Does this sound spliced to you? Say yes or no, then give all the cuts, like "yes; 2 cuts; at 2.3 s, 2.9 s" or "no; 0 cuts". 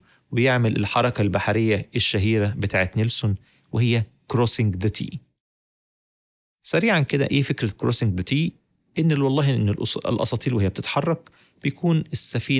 no; 0 cuts